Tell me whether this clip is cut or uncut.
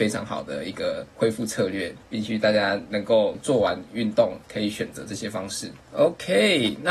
cut